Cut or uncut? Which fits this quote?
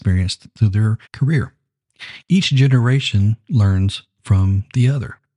cut